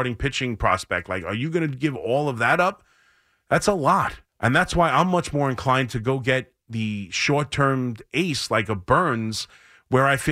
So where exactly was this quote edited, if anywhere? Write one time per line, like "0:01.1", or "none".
0:04.3